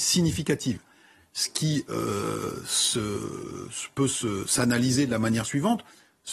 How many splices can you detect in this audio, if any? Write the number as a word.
zero